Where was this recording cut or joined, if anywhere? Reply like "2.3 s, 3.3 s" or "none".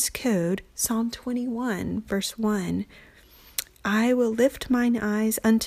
none